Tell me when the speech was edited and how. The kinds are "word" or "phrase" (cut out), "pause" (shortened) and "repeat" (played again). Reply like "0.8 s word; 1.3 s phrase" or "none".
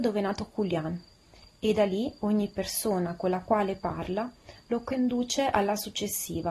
none